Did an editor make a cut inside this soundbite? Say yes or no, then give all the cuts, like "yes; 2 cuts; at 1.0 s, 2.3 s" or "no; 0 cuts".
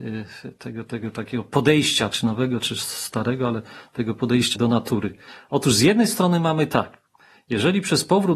yes; 2 cuts; at 2.1 s, 4.5 s